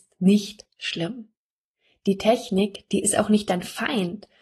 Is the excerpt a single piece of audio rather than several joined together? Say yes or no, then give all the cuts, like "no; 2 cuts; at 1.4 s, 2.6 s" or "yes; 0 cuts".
yes; 0 cuts